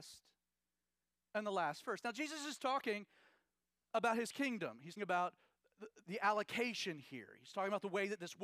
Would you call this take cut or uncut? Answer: cut